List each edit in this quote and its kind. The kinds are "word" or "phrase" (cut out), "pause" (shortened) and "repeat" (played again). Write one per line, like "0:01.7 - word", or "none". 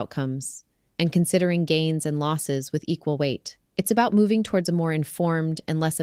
0:03.7 - pause

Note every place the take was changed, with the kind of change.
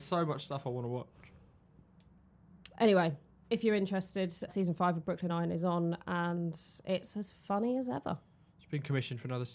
0:03.3 - word
0:04.5 - word
0:05.3 - word

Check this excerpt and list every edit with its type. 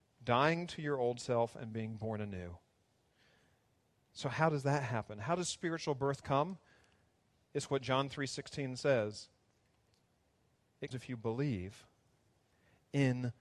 0:10.9 - word

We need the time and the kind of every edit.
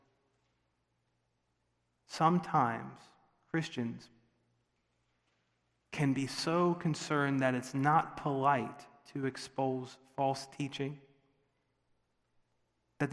none

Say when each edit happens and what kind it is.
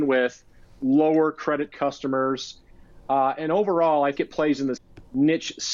0:01.7 - word
0:04.1 - word
0:04.8 - word

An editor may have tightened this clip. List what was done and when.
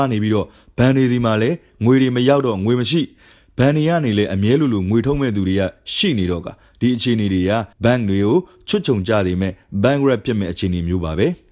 0:07.7 - pause

